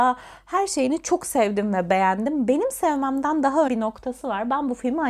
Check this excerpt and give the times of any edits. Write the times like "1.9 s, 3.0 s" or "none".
3.7 s